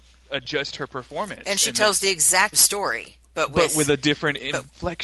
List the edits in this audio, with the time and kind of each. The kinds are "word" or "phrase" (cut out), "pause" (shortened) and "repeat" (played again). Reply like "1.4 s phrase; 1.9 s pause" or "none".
2.5 s word; 3.2 s pause